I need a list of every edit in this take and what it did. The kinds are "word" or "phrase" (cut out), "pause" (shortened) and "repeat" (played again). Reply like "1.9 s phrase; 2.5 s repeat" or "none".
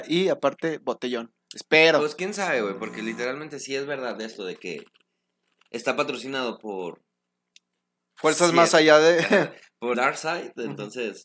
9.9 s word